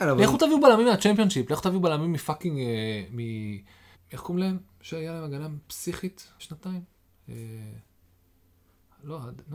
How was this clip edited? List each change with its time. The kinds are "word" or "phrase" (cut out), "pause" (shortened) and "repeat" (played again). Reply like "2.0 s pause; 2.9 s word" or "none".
3.9 s pause; 6.4 s word